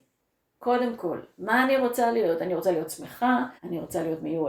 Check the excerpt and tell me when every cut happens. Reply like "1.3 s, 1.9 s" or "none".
3.6 s